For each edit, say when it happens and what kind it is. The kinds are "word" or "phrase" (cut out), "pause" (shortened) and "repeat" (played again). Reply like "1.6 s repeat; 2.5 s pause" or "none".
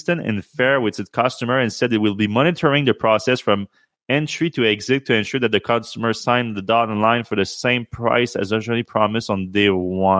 none